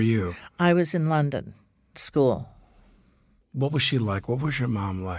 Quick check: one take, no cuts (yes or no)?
no